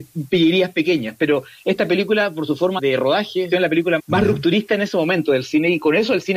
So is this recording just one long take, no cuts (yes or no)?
no